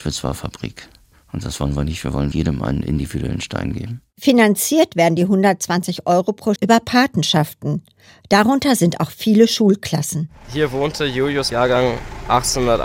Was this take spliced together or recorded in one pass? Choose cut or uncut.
cut